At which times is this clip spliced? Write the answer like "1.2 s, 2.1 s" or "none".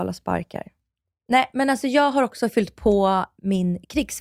none